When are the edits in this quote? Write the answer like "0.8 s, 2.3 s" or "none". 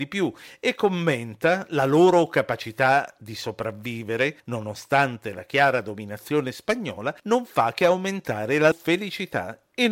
4.4 s, 7.2 s, 8.7 s